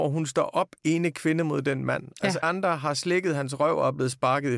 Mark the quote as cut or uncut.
cut